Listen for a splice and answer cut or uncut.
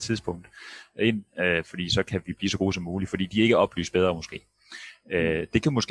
uncut